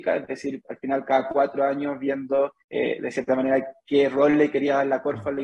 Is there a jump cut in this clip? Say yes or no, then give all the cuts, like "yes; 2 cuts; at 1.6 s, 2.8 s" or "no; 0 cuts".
yes; 1 cut; at 2.6 s